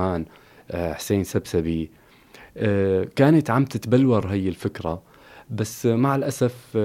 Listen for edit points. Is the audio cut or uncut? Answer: uncut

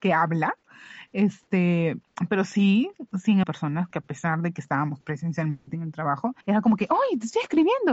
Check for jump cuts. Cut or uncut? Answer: cut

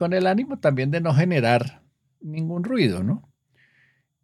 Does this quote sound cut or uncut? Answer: uncut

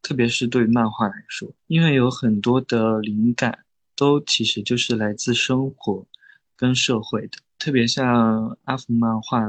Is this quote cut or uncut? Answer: uncut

